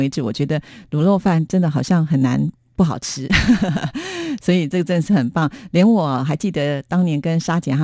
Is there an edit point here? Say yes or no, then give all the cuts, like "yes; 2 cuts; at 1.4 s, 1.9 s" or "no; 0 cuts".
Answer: no; 0 cuts